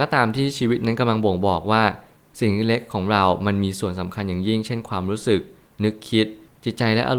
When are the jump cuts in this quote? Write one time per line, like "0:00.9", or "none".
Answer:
none